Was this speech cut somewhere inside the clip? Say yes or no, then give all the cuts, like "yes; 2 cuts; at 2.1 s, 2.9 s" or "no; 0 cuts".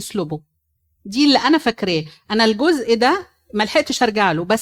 no; 0 cuts